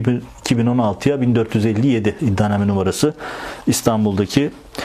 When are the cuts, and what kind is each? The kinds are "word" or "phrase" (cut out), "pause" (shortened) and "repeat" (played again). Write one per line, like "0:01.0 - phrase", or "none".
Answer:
none

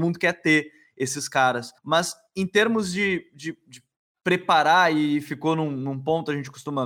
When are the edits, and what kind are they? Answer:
0:01.8 - pause

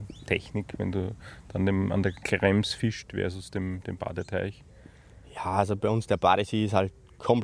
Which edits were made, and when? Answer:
none

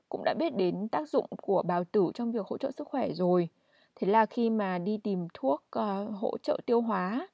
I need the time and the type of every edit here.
none

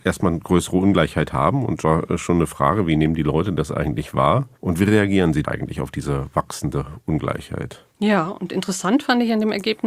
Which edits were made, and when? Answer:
0:01.8 - word
0:04.6 - pause
0:05.4 - word
0:07.9 - pause

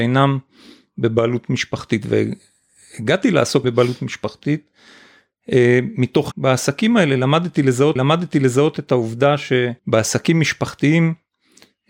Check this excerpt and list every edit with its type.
0:03.6 - word
0:06.3 - word
0:08.0 - repeat
0:09.8 - pause

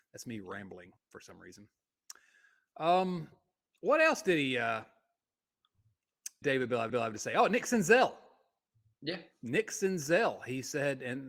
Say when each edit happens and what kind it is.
0:01.0 - word
0:06.4 - word
0:06.9 - repeat

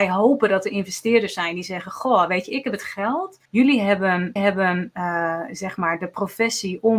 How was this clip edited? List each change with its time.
0:03.4 - pause
0:04.4 - repeat

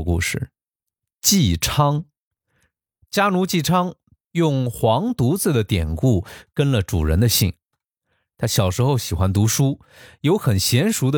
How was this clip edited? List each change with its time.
0:04.2 - phrase

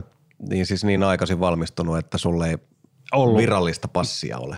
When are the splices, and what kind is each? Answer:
none

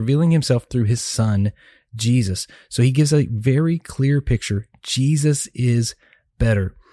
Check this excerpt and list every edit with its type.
none

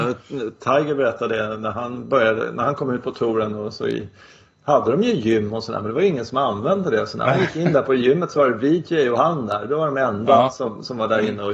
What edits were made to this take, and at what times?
none

